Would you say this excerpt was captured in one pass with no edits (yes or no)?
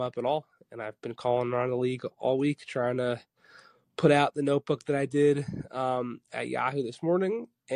yes